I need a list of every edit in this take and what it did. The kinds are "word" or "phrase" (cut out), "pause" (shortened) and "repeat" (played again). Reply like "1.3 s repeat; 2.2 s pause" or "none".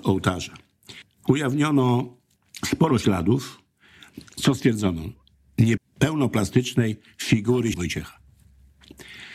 5.8 s word; 7.7 s word